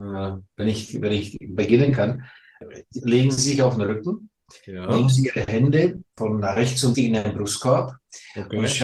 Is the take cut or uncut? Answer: cut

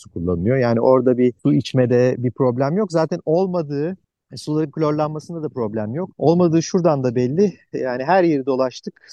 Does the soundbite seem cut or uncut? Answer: cut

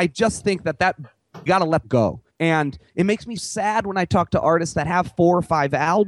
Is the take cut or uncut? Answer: cut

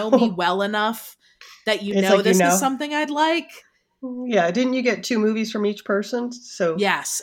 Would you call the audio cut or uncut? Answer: uncut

